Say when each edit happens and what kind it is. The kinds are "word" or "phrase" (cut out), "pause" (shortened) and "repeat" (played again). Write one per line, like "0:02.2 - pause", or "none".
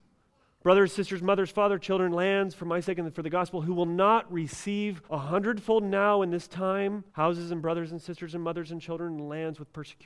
0:05.0 - pause
0:07.1 - pause